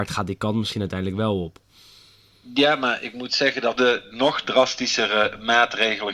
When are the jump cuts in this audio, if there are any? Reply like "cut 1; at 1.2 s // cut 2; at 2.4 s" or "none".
cut 1; at 3.7 s